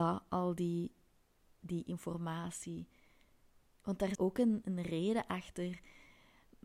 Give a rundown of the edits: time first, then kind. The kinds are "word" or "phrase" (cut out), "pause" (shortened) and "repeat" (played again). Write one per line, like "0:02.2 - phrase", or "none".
0:04.1 - word
0:04.6 - word